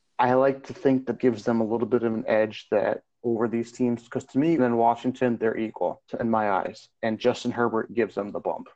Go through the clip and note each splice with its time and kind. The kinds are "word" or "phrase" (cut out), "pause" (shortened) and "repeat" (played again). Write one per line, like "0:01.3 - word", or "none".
0:01.2 - word
0:04.6 - word
0:06.1 - pause
0:06.9 - pause